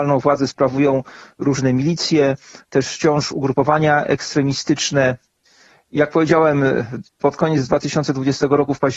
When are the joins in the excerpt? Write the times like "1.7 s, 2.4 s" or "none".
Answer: none